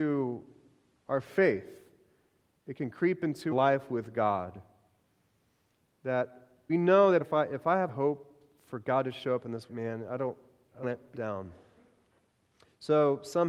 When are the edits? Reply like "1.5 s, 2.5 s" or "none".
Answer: 3.5 s, 6.7 s, 7.2 s, 7.9 s, 9.7 s, 10.8 s, 11.1 s